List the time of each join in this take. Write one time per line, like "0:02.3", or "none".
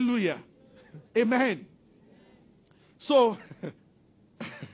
0:01.1
0:03.8